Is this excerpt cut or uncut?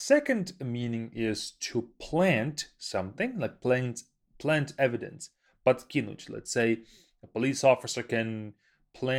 uncut